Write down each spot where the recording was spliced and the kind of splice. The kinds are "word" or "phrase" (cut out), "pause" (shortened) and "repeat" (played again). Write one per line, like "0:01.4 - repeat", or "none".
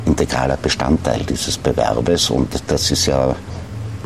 none